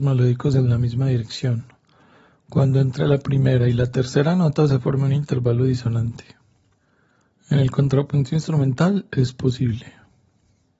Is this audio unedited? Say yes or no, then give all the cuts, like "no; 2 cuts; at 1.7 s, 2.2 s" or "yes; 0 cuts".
yes; 0 cuts